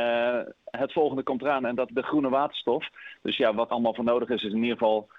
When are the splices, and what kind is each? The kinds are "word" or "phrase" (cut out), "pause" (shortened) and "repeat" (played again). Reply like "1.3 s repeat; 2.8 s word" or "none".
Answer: 1.9 s word; 3.7 s word